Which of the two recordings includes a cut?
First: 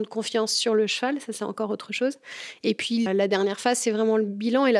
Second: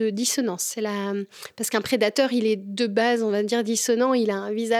first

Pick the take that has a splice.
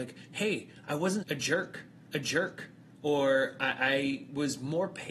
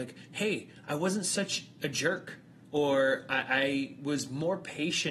first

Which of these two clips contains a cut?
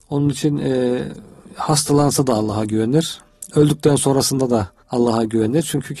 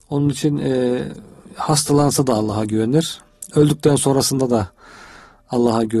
first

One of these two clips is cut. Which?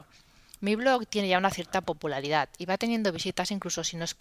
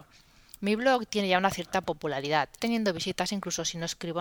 second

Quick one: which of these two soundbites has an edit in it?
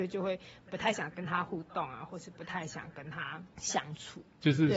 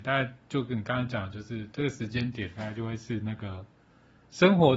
first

